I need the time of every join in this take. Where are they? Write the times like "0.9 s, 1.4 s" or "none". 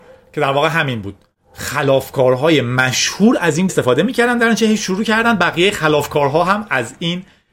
3.7 s